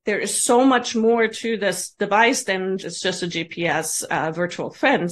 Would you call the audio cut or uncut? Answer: cut